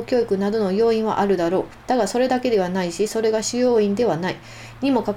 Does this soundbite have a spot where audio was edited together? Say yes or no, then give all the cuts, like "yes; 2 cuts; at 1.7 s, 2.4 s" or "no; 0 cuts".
yes; 1 cut; at 1.8 s